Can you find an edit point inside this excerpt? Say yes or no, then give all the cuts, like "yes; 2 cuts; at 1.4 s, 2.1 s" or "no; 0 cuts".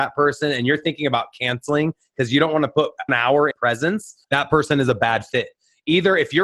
yes; 3 cuts; at 3.1 s, 3.5 s, 4.2 s